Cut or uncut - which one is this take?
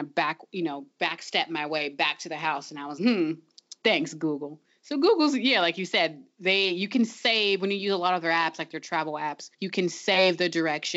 cut